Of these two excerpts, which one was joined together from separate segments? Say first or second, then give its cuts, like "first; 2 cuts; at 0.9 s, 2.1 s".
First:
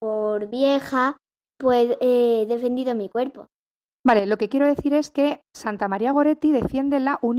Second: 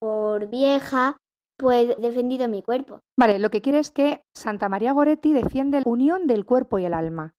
second; 4 cuts; at 2.0 s, 3.1 s, 3.7 s, 5.8 s